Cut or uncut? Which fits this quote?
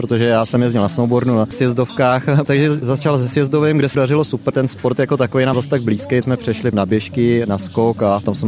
cut